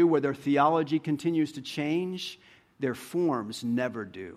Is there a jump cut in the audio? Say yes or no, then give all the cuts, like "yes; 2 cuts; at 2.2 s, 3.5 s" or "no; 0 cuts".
no; 0 cuts